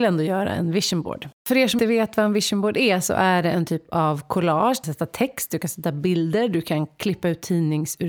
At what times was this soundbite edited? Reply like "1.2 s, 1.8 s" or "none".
1.8 s, 4.8 s

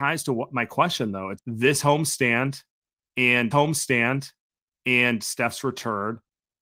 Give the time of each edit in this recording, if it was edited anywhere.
1.4 s, 3.5 s

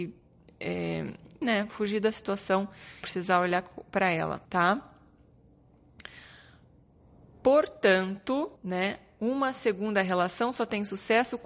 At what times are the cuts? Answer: 1.4 s, 3.0 s, 4.4 s, 8.6 s

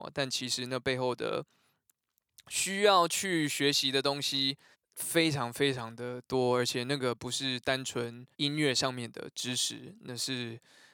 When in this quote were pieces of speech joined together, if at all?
4.7 s, 8.3 s

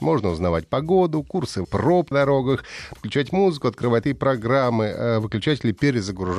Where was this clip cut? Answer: 1.6 s, 2.1 s, 3.0 s, 4.0 s

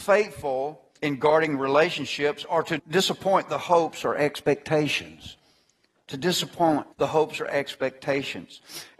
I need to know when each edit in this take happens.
1.0 s, 2.8 s, 6.9 s

